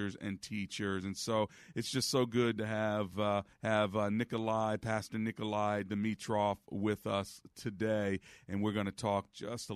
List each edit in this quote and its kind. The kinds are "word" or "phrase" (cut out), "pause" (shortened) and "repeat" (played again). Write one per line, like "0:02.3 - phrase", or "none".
0:03.5 - pause